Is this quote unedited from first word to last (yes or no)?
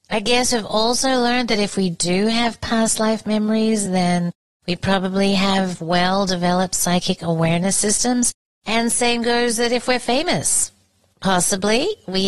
yes